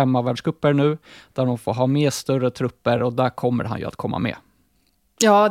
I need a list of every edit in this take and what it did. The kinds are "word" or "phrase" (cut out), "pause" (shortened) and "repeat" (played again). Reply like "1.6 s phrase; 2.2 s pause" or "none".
none